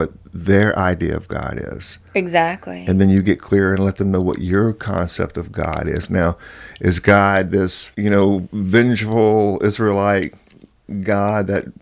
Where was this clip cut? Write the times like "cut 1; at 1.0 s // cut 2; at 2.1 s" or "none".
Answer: cut 1; at 7.9 s